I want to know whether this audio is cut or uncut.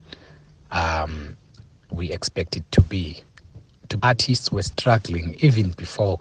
cut